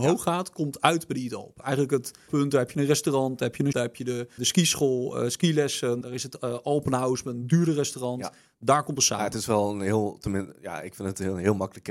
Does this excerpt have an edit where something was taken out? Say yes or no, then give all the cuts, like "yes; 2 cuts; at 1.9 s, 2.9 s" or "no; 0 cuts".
yes; 5 cuts; at 2.3 s, 3.7 s, 4.4 s, 6.0 s, 9.0 s